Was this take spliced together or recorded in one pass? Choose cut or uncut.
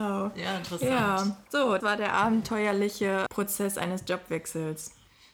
cut